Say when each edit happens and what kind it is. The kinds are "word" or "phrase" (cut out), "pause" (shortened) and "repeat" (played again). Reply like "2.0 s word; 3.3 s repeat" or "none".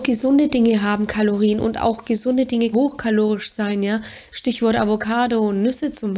2.7 s word